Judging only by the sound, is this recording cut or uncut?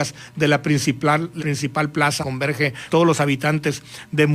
cut